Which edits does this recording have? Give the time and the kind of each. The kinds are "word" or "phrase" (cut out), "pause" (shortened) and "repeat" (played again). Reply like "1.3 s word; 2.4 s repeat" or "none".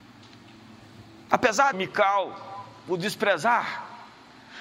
1.7 s phrase